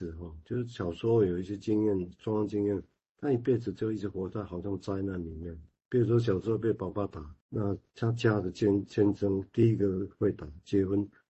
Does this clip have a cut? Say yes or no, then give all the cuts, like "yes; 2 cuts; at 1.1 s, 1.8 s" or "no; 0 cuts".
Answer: yes; 1 cut; at 7.4 s